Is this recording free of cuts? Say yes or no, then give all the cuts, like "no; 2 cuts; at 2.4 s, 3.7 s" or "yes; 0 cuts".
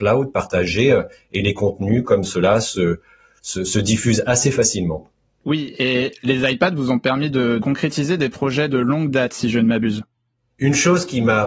yes; 0 cuts